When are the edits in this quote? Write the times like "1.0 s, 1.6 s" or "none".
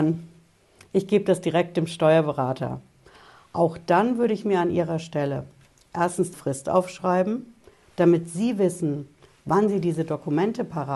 6.3 s